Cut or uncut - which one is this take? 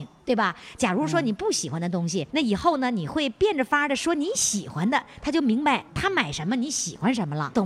cut